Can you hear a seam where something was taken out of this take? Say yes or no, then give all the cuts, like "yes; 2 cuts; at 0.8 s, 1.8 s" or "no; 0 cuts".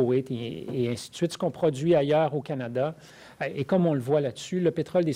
no; 0 cuts